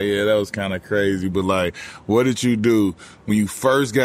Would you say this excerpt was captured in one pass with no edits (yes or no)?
yes